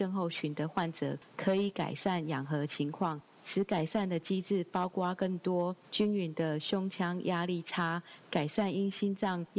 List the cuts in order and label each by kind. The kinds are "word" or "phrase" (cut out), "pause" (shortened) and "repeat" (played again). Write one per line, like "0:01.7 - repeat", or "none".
0:05.8 - pause